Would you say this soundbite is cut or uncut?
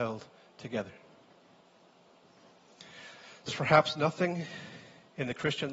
cut